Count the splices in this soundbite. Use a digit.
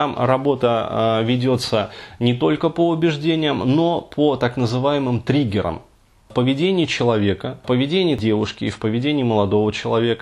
0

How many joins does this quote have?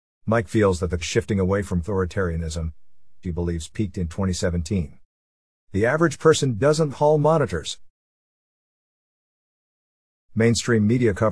4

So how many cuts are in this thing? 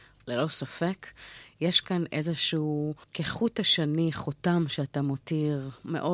1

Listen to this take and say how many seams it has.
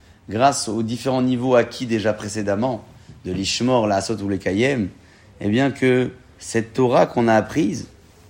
0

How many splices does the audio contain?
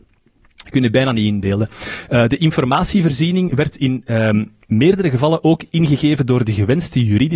1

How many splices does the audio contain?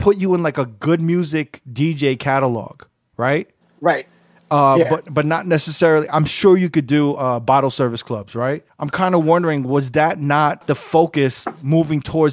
0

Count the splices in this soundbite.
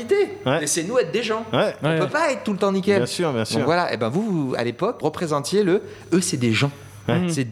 1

